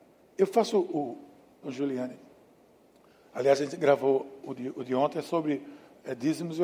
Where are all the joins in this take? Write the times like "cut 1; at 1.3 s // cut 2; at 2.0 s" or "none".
cut 1; at 1.6 s